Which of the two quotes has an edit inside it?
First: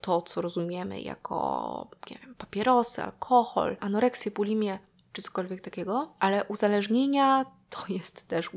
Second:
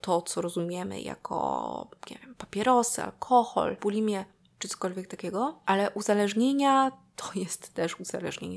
second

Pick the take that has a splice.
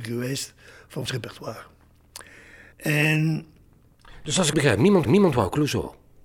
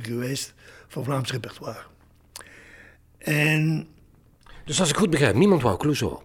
first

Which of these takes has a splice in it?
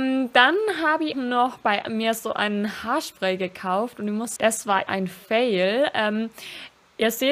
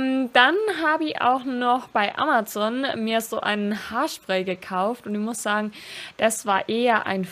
first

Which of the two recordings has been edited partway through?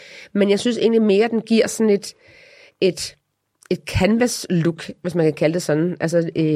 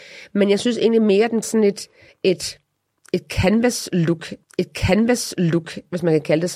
second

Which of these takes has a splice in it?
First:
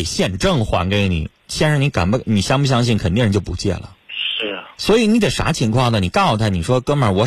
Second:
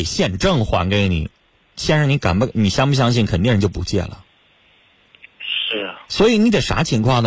first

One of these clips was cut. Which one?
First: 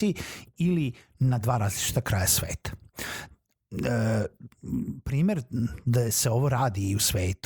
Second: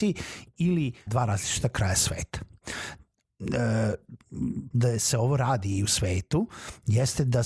second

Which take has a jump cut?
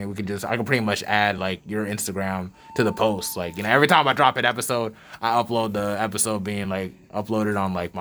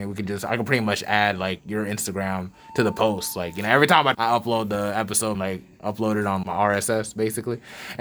second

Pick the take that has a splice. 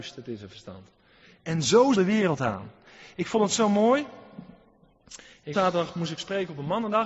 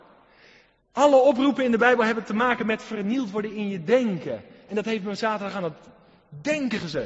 first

